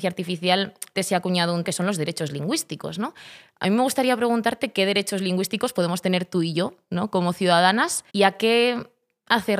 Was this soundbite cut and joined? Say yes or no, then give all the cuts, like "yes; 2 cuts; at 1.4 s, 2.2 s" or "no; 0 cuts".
yes; 3 cuts; at 1.0 s, 1.6 s, 8.1 s